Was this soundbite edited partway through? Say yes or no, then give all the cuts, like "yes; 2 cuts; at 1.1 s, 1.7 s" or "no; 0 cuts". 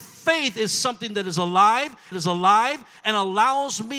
yes; 1 cut; at 2.1 s